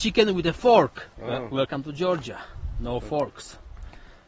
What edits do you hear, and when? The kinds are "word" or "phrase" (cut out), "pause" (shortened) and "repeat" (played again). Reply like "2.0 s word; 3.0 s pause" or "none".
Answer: 1.1 s pause